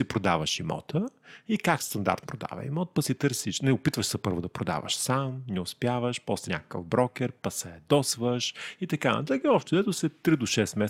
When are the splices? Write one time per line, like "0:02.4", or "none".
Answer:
0:02.2
0:06.4